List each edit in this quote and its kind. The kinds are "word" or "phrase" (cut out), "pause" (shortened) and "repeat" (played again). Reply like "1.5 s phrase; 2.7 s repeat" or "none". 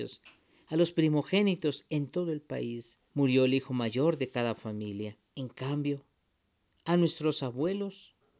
3.1 s pause; 5.3 s pause